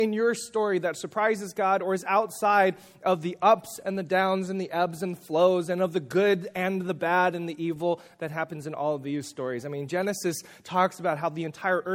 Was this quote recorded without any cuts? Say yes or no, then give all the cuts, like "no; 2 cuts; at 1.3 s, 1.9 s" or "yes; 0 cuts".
yes; 0 cuts